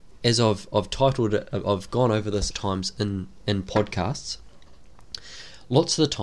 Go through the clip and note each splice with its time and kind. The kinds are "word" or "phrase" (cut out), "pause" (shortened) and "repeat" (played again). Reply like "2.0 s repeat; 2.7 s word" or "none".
2.5 s phrase